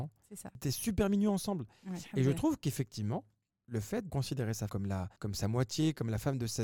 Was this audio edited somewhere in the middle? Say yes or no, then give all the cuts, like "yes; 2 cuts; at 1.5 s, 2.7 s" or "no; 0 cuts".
yes; 4 cuts; at 3.5 s, 4.1 s, 4.7 s, 5.2 s